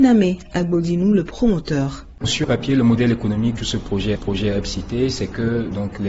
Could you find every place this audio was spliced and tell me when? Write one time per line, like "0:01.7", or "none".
0:02.4
0:03.6
0:04.2